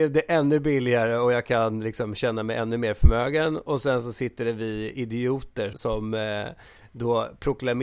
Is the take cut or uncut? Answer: cut